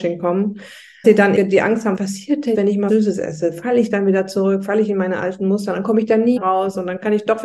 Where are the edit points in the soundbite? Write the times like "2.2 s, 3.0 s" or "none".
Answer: 1.0 s, 1.4 s, 2.0 s, 2.5 s, 2.9 s, 6.4 s